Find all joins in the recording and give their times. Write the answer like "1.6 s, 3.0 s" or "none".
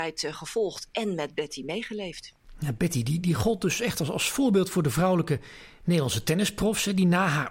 none

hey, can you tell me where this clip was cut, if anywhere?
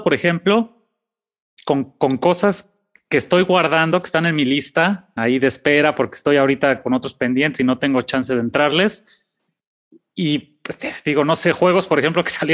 none

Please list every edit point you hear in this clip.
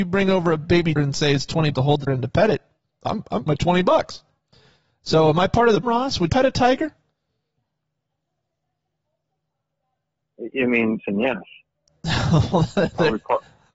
1.0 s, 1.7 s, 2.1 s, 3.5 s, 5.8 s, 6.3 s, 11.0 s

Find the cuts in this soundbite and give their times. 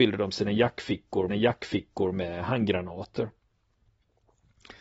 1.3 s

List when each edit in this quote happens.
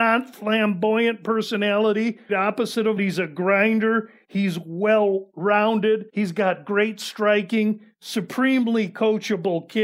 2.3 s, 3.0 s, 6.1 s

